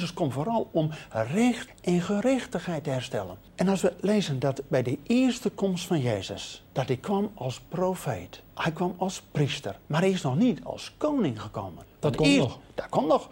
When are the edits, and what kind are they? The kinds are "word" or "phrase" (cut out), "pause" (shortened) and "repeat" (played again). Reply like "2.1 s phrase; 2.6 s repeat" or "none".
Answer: 8.5 s pause; 9.8 s pause